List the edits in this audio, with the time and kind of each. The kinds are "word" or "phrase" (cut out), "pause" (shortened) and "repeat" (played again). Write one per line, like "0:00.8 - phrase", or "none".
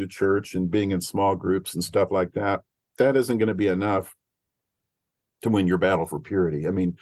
none